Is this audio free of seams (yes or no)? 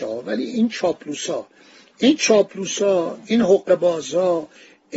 yes